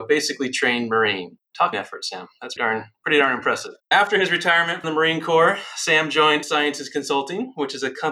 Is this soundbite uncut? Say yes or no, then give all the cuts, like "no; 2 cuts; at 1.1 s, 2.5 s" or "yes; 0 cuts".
no; 5 cuts; at 1.7 s, 2.6 s, 3.8 s, 4.8 s, 6.4 s